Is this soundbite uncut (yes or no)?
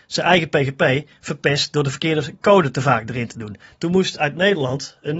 yes